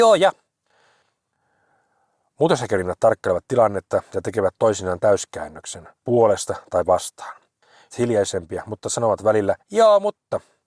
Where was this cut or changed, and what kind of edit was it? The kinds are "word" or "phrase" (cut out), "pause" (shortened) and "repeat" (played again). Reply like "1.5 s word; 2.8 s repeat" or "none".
6.0 s pause; 7.9 s word; 9.6 s pause